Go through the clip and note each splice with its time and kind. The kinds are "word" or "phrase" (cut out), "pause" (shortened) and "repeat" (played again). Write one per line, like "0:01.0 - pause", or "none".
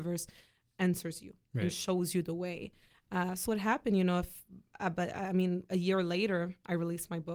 0:03.5 - word